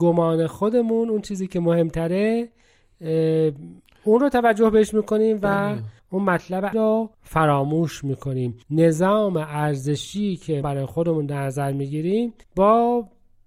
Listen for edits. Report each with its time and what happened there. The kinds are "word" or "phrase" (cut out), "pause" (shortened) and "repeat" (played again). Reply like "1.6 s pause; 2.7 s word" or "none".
6.0 s pause; 6.7 s word; 7.1 s pause; 8.6 s pause; 10.6 s word; 12.4 s pause